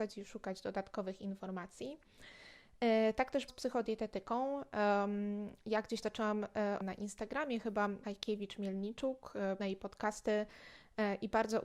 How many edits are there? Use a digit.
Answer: 5